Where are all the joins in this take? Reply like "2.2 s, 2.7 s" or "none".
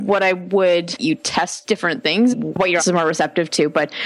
1.0 s, 2.3 s, 2.8 s